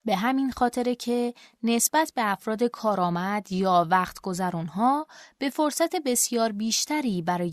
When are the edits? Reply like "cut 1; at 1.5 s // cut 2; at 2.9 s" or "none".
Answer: none

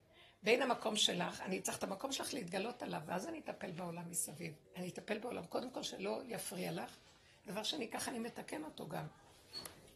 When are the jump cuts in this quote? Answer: cut 1; at 4.6 s

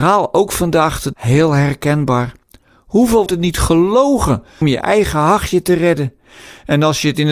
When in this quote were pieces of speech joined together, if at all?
cut 1; at 1.1 s // cut 2; at 3.3 s // cut 3; at 4.6 s

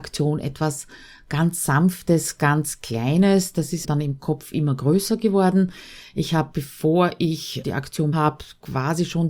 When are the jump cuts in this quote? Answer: cut 1; at 3.8 s // cut 2; at 7.6 s // cut 3; at 8.1 s

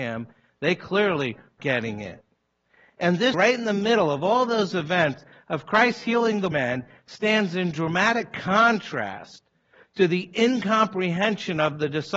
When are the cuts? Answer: cut 1; at 1.6 s // cut 2; at 3.3 s // cut 3; at 6.5 s

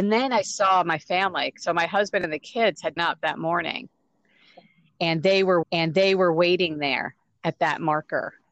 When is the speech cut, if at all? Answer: cut 1; at 3.0 s // cut 2; at 5.6 s

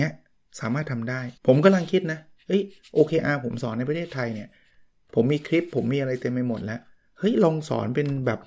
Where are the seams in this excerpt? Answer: cut 1; at 1.4 s

